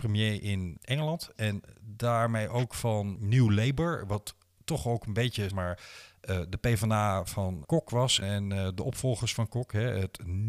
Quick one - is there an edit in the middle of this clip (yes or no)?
yes